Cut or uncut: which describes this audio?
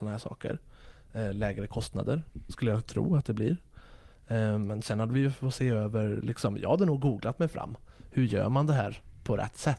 uncut